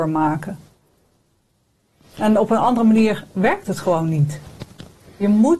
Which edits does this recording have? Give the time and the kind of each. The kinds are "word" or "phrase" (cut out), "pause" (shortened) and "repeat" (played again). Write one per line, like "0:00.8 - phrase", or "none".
none